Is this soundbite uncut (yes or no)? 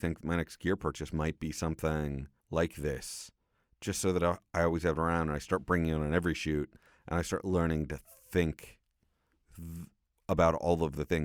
no